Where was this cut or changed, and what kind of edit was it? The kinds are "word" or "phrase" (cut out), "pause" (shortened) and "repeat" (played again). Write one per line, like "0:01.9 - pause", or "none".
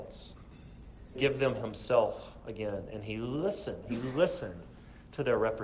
0:01.1 - word